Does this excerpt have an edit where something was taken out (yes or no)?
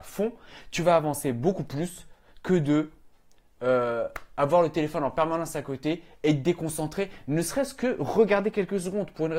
no